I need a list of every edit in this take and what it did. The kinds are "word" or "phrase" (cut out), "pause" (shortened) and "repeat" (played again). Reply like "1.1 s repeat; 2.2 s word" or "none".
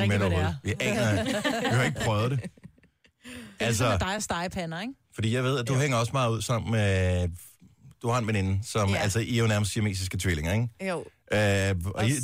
none